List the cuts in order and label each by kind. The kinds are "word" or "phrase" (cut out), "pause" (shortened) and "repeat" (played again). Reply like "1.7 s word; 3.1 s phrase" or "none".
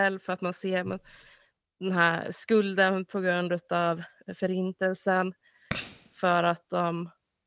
none

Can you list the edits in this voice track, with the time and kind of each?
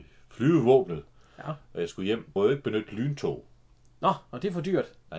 2.4 s word

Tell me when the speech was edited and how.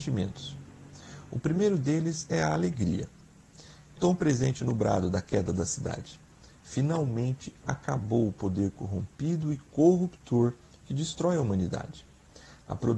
4.0 s word

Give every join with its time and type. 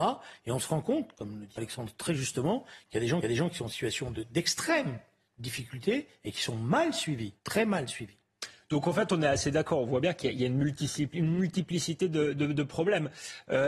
1.6 s word; 3.2 s repeat; 7.4 s pause

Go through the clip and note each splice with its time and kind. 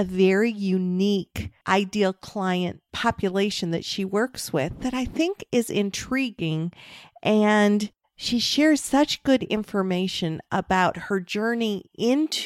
none

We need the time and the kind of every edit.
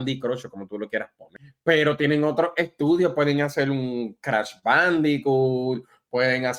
none

